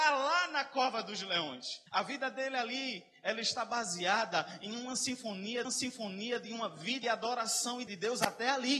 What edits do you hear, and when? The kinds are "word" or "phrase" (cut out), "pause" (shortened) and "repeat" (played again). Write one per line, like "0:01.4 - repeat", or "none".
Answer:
0:01.9 - pause
0:05.7 - repeat
0:07.0 - phrase
0:07.9 - word